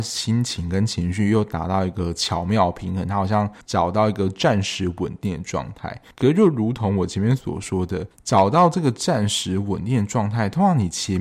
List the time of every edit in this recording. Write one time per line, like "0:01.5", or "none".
0:03.6
0:06.1
0:08.1